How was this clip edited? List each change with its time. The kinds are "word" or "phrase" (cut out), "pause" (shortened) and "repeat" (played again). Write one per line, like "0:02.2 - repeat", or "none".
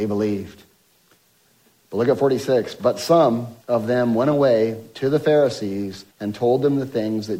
0:03.6 - pause
0:06.1 - pause